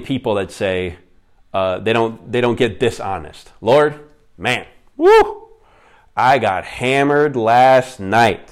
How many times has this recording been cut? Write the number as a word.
zero